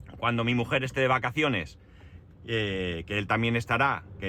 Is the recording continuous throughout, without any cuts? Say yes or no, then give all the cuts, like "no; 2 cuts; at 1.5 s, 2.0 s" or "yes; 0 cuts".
yes; 0 cuts